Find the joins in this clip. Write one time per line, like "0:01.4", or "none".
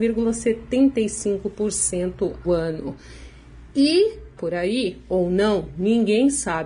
0:02.4
0:04.4